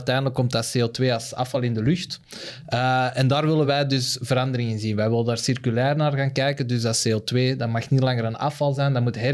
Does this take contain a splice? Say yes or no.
no